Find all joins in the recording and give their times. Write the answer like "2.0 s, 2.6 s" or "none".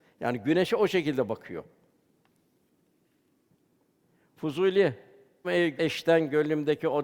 5.4 s, 5.8 s